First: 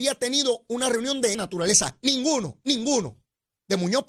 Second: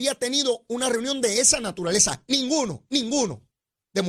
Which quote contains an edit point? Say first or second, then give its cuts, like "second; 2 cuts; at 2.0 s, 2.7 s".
first; 1 cut; at 1.3 s